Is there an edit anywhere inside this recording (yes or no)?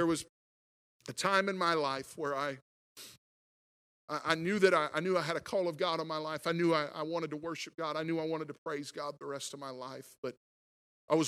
no